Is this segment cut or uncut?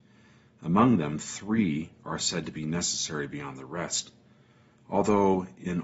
uncut